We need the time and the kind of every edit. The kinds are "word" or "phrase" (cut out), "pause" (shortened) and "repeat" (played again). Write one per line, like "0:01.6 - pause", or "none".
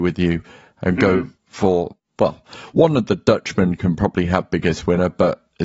0:01.4 - pause